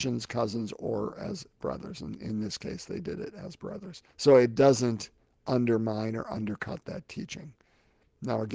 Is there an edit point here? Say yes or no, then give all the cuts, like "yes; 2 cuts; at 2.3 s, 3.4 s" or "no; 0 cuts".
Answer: yes; 2 cuts; at 4.1 s, 6.8 s